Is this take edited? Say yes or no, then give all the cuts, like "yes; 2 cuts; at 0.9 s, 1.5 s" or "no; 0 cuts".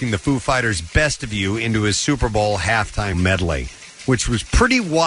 yes; 1 cut; at 3.1 s